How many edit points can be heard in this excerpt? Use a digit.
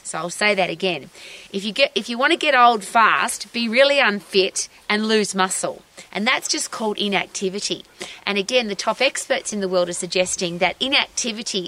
0